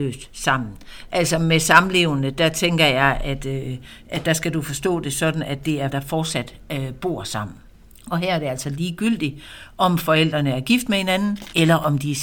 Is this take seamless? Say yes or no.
no